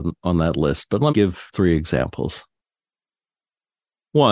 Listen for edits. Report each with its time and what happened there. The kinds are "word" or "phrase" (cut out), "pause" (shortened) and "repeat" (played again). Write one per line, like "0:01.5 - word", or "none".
0:01.1 - word
0:01.5 - word